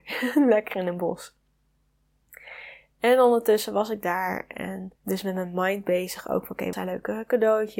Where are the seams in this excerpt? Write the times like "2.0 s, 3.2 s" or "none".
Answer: 5.0 s, 6.7 s